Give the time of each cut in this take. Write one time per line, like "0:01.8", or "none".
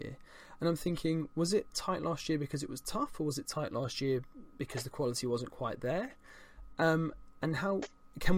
none